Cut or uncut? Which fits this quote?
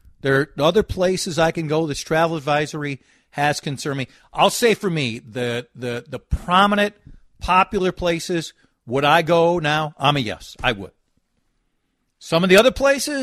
uncut